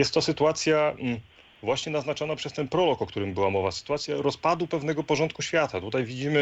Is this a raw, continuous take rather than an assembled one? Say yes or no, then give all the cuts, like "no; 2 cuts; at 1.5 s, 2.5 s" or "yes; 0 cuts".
yes; 0 cuts